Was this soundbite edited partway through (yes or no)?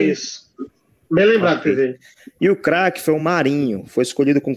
no